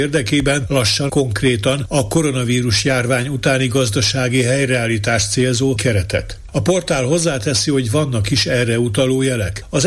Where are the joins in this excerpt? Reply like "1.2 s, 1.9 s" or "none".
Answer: 1.1 s, 5.8 s